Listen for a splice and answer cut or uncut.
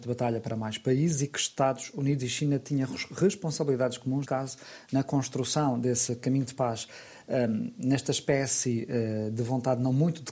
cut